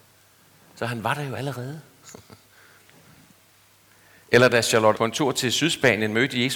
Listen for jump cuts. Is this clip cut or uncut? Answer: cut